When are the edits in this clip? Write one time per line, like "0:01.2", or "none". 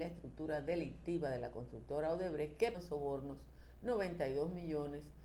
0:02.7